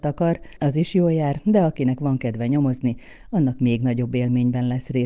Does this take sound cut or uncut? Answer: uncut